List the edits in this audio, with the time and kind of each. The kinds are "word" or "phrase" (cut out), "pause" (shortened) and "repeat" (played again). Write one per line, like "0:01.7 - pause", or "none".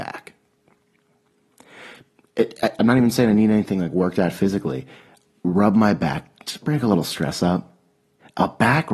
none